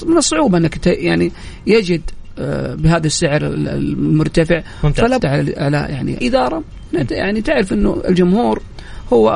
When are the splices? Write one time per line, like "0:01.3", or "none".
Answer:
0:05.2
0:06.2